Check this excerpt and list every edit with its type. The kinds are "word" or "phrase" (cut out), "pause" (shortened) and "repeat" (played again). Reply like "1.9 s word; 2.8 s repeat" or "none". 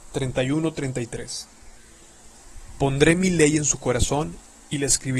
none